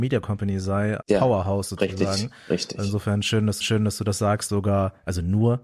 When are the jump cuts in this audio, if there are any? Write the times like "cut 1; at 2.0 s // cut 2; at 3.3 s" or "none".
cut 1; at 1.0 s // cut 2; at 3.6 s // cut 3; at 4.5 s